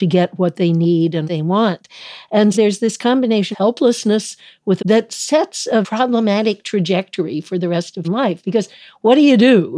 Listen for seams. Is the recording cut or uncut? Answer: cut